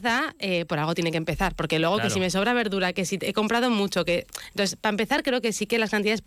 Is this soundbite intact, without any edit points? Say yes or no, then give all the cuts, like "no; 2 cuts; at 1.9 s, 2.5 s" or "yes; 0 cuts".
yes; 0 cuts